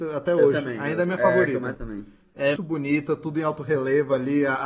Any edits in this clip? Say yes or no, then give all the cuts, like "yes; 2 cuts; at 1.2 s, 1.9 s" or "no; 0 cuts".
yes; 2 cuts; at 1.7 s, 2.6 s